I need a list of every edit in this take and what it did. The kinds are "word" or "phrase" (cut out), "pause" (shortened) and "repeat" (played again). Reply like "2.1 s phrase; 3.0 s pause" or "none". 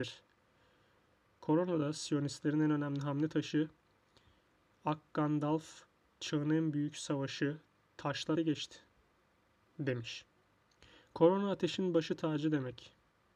8.4 s word